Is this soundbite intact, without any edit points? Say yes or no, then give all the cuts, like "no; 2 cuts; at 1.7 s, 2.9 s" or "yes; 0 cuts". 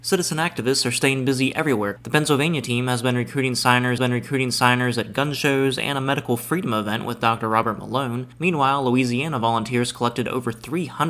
no; 1 cut; at 4.0 s